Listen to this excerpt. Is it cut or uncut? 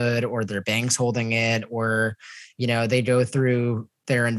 uncut